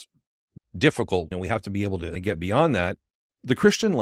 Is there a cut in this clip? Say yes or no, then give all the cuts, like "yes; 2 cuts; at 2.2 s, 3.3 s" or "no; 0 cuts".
no; 0 cuts